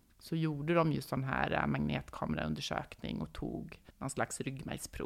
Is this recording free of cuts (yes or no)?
no